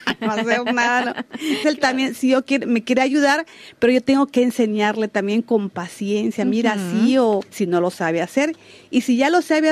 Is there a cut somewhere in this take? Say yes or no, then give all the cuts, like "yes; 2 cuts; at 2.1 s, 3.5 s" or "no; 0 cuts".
yes; 2 cuts; at 1.6 s, 7.4 s